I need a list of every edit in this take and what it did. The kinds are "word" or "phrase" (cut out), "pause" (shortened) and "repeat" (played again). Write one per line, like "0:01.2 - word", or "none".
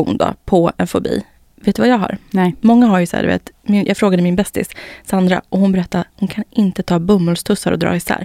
none